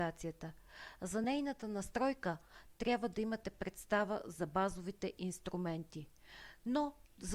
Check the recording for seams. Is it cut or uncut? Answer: uncut